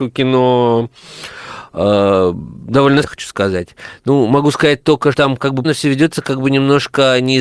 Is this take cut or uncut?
cut